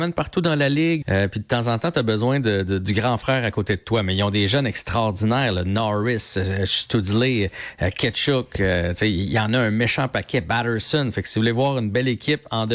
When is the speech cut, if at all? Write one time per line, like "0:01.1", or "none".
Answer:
0:01.0